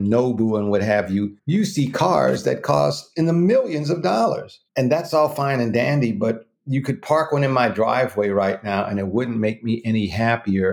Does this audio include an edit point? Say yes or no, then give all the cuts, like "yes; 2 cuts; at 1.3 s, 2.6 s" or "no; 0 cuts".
yes; 2 cuts; at 1.4 s, 4.7 s